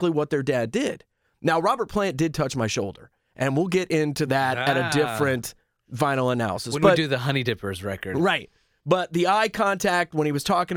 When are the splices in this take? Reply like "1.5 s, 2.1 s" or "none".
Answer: none